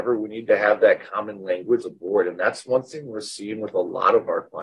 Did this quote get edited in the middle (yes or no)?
yes